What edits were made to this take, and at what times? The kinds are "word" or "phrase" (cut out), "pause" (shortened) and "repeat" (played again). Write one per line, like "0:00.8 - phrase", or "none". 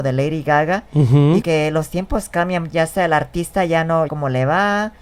0:01.4 - word
0:02.7 - word
0:04.1 - phrase